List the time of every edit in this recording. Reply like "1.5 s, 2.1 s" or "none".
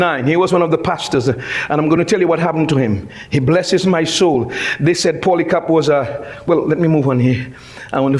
none